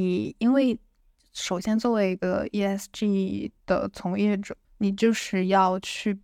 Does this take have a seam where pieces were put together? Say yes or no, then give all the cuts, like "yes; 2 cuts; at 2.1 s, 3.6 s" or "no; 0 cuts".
yes; 1 cut; at 4.6 s